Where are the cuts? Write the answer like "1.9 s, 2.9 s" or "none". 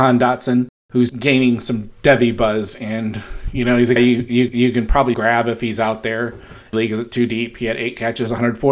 1.1 s, 4.0 s, 4.5 s, 5.1 s, 6.7 s